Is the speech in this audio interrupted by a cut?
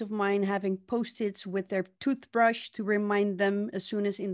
no; 0 cuts

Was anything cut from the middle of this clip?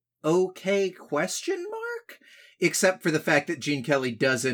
no; 0 cuts

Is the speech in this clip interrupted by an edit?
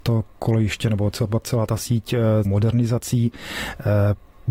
yes; 2 cuts; at 1.4 s, 2.4 s

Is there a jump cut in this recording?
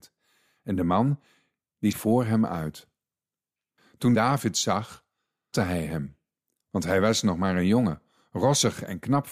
yes; 3 cuts; at 1.9 s, 4.1 s, 5.5 s

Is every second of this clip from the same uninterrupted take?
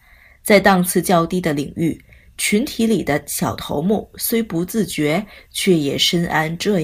yes; 0 cuts

